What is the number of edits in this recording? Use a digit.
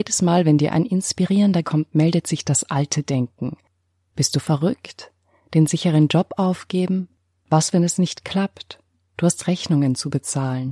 1